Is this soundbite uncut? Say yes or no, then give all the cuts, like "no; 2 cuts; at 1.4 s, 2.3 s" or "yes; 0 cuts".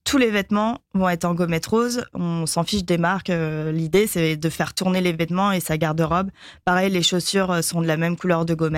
yes; 0 cuts